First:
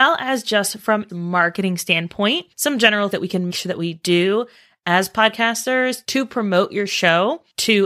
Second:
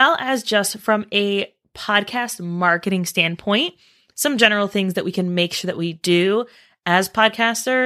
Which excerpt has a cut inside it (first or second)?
first